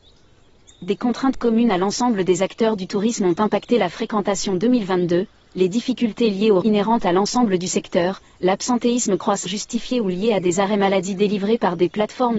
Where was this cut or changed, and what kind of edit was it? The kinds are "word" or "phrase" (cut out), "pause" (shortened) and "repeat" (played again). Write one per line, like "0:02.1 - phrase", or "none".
0:06.6 - word
0:09.5 - word